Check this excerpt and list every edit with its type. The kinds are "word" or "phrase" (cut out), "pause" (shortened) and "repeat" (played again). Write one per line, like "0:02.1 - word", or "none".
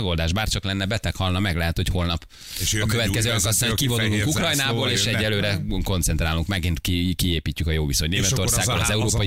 none

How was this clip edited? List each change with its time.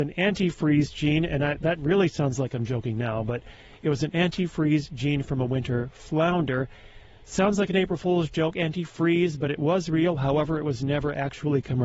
none

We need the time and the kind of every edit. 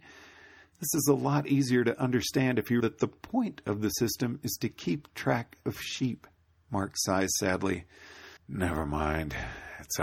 0:02.8 - word
0:06.4 - pause
0:08.4 - pause

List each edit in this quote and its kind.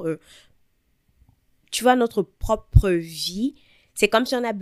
none

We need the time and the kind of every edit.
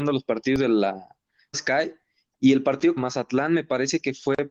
0:01.5 - word
0:03.0 - word

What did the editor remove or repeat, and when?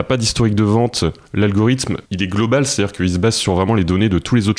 0:02.0 - pause

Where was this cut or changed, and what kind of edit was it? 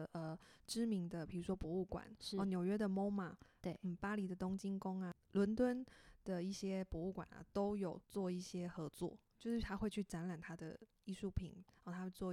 0:08.0 - pause

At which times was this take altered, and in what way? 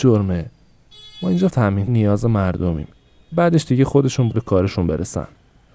0:01.5 - word
0:01.9 - word
0:03.3 - word
0:04.3 - word

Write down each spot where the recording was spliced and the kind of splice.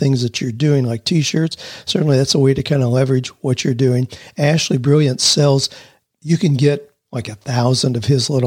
none

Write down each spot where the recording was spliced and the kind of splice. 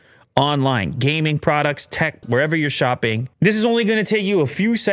0:02.2 - word
0:03.3 - pause

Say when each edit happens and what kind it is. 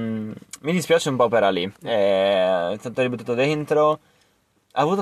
0:01.7 - pause

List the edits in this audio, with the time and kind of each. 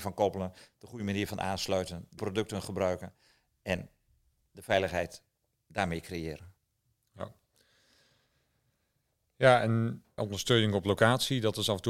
0:02.2 - word
0:05.4 - pause
0:10.2 - phrase

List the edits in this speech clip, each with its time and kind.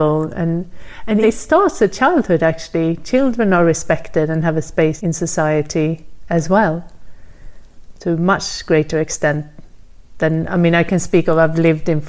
0:01.2 - word
0:05.0 - word

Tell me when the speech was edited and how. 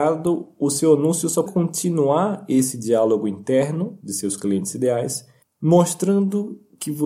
0:01.5 - word
0:05.4 - pause

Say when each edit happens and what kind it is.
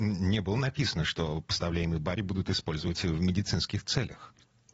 none

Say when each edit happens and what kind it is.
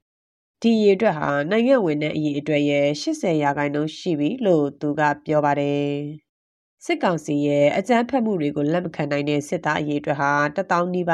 0:09.5 - word

